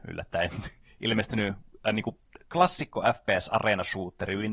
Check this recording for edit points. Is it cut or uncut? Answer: uncut